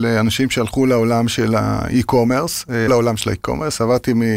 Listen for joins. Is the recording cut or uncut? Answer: cut